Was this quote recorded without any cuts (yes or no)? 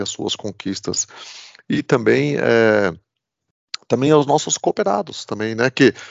yes